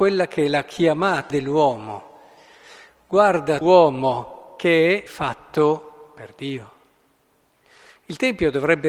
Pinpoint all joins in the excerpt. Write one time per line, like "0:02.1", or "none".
0:01.3
0:03.6
0:05.1